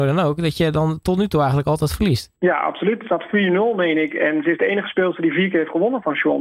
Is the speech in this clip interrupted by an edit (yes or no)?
yes